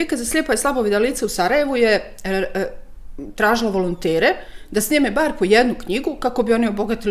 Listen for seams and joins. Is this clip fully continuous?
yes; 0 cuts

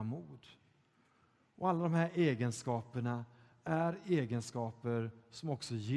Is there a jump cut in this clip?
no; 0 cuts

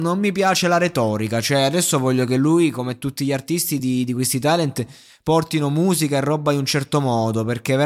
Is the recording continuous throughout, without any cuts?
yes; 0 cuts

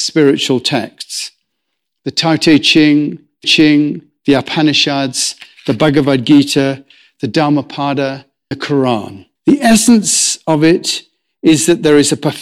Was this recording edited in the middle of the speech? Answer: yes; 3 cuts; at 3.4 s, 8.5 s, 9.4 s

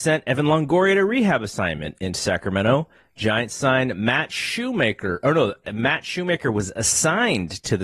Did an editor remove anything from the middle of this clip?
yes; 1 cut; at 5.6 s

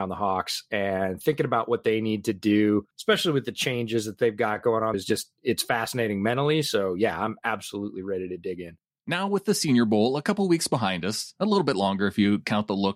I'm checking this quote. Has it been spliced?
yes; 3 cuts; at 2.9 s, 4.9 s, 8.8 s

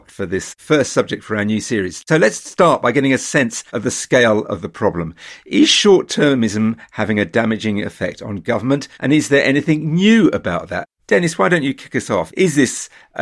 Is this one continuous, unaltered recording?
no; 2 cuts; at 3.7 s, 8.9 s

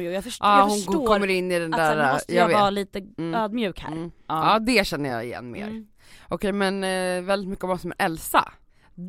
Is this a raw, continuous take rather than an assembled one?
yes; 0 cuts

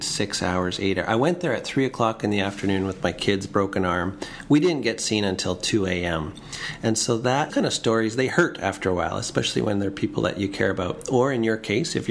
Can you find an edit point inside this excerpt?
yes; 1 cut; at 7.5 s

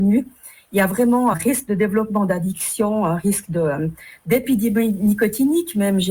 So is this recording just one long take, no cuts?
no; 1 cut; at 1.3 s

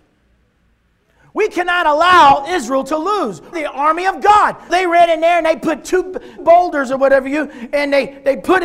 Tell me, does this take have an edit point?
yes; 3 cuts; at 3.5 s, 4.7 s, 6.4 s

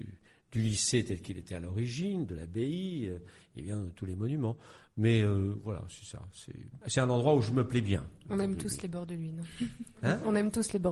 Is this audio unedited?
no; 1 cut; at 6.8 s

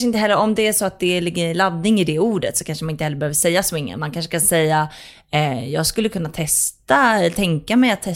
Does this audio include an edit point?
no; 0 cuts

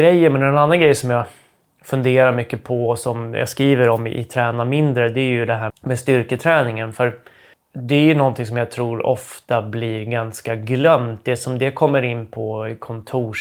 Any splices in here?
yes; 1 cut; at 5.7 s

